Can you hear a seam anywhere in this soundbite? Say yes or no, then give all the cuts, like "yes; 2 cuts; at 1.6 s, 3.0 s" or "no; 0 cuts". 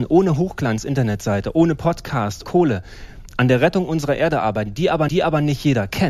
yes; 2 cuts; at 2.4 s, 5.1 s